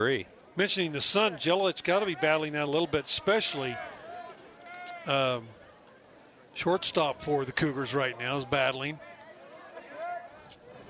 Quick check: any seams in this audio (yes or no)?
no